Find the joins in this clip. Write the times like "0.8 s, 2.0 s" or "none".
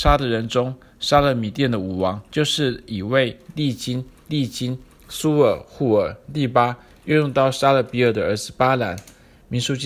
2.3 s, 4.3 s